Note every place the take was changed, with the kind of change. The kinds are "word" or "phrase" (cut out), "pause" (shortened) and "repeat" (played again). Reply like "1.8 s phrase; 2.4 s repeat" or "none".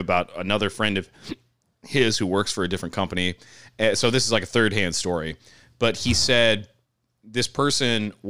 none